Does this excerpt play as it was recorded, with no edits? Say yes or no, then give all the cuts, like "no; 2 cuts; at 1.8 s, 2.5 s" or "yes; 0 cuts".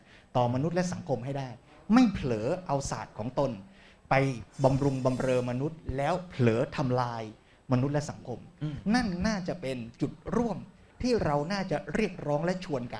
yes; 0 cuts